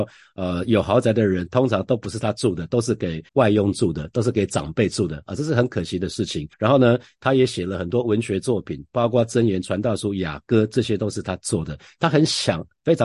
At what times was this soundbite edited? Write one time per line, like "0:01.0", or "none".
0:03.3
0:06.5